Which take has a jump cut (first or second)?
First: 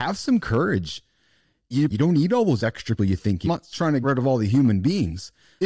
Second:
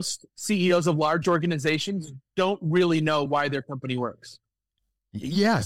first